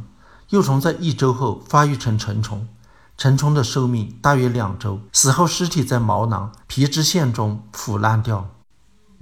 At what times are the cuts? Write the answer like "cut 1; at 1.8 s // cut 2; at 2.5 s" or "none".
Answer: cut 1; at 5.1 s // cut 2; at 6.6 s

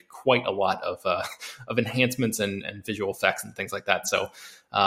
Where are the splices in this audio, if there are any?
none

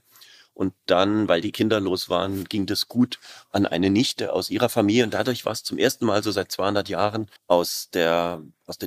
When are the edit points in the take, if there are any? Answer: cut 1; at 7.4 s

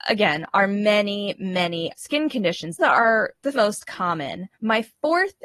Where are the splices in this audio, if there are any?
cut 1; at 2.0 s // cut 2; at 2.8 s // cut 3; at 3.5 s // cut 4; at 4.5 s

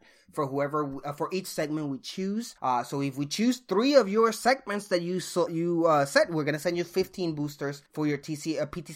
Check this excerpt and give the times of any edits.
cut 1; at 2.6 s // cut 2; at 5.5 s // cut 3; at 7.9 s

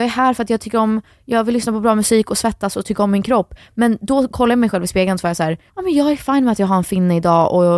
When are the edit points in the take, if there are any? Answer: cut 1; at 5.7 s

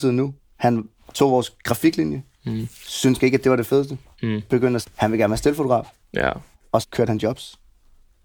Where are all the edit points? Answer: cut 1; at 3.2 s // cut 2; at 4.8 s // cut 3; at 6.8 s

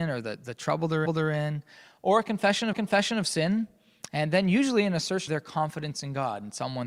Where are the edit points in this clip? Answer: cut 1; at 1.1 s // cut 2; at 2.7 s // cut 3; at 5.3 s

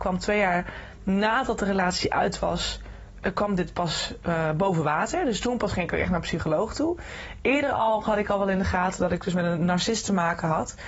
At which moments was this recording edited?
none

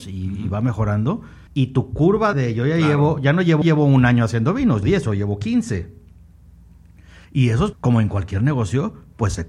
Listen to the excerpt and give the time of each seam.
cut 1; at 1.5 s // cut 2; at 2.3 s // cut 3; at 3.6 s // cut 4; at 4.8 s // cut 5; at 7.2 s // cut 6; at 7.7 s

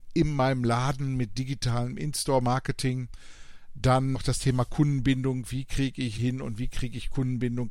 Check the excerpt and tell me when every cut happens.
cut 1; at 4.1 s // cut 2; at 6.2 s

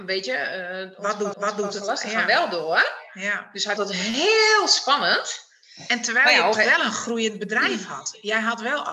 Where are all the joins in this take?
cut 1; at 1.3 s // cut 2; at 3.8 s // cut 3; at 6.5 s

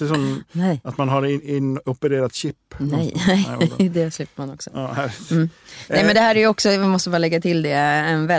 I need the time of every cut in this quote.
none

